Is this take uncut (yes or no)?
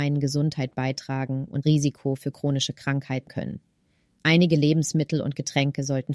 no